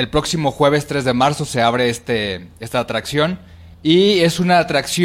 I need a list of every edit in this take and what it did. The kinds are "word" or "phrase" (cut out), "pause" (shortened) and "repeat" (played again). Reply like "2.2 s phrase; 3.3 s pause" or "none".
3.7 s pause